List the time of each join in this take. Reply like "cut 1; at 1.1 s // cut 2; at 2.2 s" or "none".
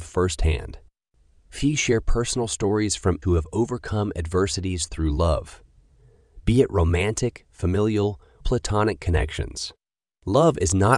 cut 1; at 3.2 s // cut 2; at 8.4 s